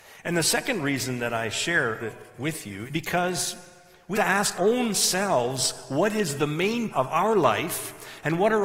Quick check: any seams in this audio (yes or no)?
yes